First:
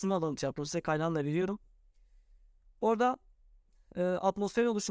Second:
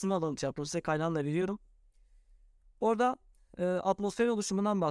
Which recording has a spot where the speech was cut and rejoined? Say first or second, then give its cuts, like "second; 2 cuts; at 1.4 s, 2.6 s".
second; 1 cut; at 3.3 s